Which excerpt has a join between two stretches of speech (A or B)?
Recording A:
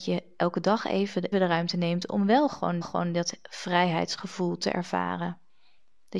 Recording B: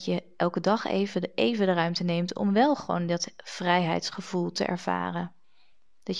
A